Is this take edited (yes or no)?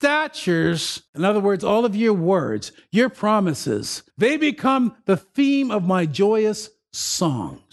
yes